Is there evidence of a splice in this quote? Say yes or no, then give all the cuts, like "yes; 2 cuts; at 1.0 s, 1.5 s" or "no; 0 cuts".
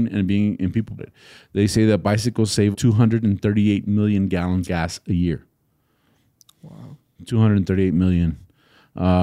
yes; 3 cuts; at 1.0 s, 2.7 s, 4.6 s